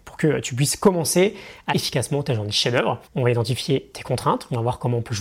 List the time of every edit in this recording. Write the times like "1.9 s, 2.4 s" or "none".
1.7 s, 3.1 s

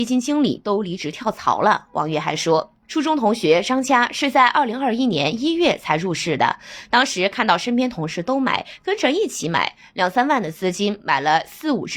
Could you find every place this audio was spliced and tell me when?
2.8 s

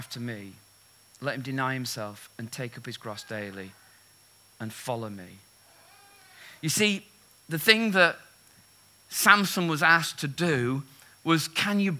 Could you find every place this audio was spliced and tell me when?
none

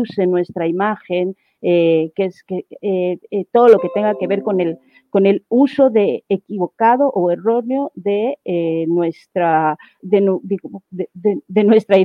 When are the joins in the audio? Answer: 10.0 s

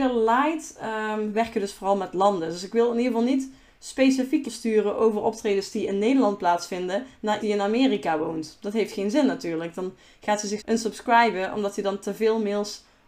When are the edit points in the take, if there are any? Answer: 4.4 s, 7.4 s, 10.6 s

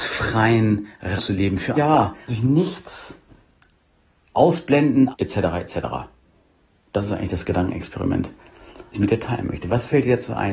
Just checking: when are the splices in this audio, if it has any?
1.2 s, 1.7 s, 2.3 s, 5.1 s, 8.9 s

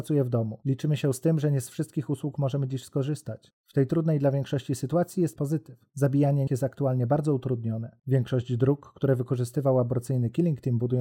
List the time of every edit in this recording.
5.4 s, 6.5 s

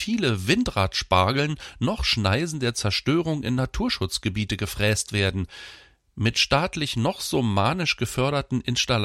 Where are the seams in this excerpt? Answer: none

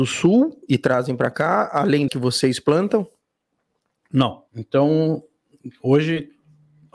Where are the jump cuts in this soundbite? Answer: 2.1 s, 4.5 s

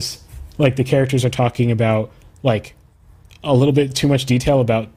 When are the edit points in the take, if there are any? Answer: none

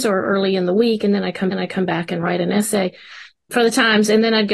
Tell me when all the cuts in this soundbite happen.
1.5 s

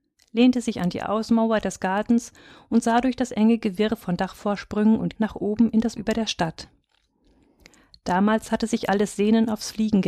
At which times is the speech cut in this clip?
5.2 s, 6.0 s

